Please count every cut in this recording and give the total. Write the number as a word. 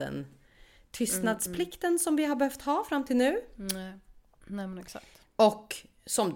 zero